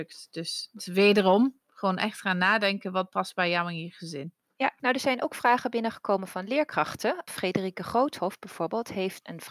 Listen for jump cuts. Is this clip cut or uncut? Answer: uncut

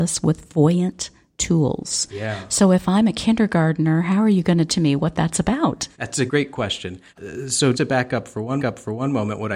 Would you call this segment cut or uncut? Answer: cut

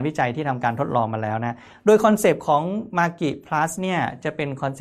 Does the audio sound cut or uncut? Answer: uncut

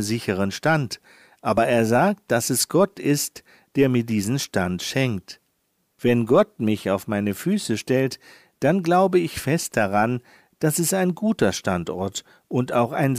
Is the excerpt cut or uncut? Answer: uncut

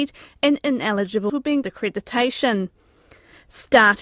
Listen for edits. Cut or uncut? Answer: cut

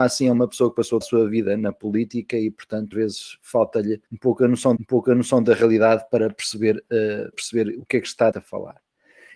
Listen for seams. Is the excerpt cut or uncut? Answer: cut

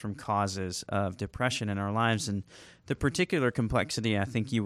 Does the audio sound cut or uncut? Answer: uncut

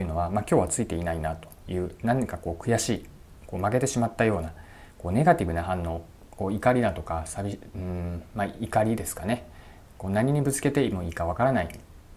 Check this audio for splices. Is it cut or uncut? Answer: uncut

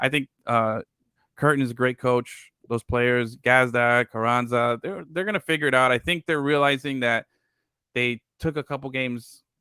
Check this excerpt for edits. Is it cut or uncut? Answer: uncut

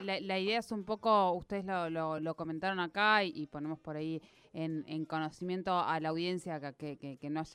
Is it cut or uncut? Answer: uncut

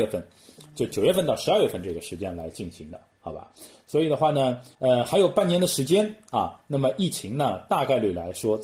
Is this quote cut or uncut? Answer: cut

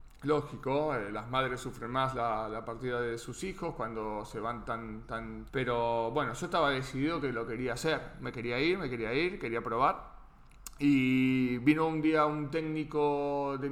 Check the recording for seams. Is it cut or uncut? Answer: cut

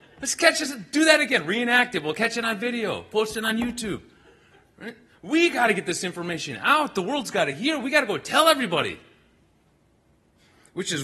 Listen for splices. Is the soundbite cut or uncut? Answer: uncut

